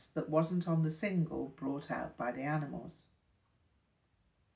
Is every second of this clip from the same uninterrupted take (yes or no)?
yes